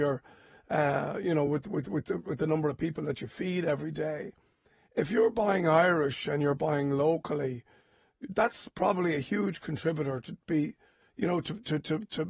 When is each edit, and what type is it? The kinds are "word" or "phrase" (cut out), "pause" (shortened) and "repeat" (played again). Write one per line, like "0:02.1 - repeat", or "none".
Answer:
none